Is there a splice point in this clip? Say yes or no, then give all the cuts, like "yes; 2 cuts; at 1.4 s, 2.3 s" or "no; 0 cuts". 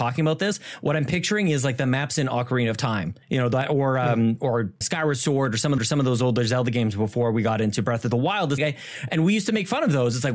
yes; 4 cuts; at 3.2 s, 4.8 s, 5.8 s, 8.6 s